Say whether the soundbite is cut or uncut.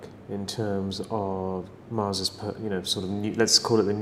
uncut